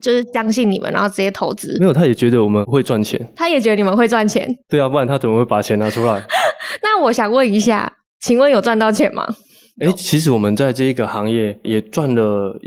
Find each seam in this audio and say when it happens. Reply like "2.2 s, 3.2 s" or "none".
11.6 s